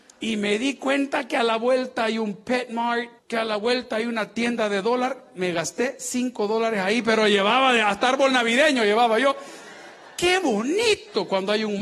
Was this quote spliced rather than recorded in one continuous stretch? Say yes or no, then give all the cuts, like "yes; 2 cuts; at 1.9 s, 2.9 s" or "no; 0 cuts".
yes; 1 cut; at 3.2 s